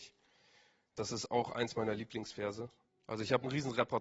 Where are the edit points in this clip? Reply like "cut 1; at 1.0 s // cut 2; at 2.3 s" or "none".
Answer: none